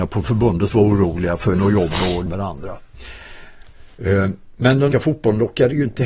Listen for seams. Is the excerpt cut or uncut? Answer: cut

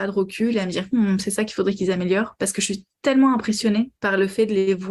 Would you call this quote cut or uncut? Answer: cut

